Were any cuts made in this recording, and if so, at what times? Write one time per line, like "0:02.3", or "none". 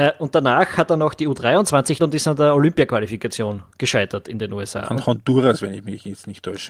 0:02.0